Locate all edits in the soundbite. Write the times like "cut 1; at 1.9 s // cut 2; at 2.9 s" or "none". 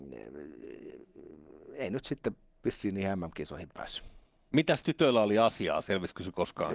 none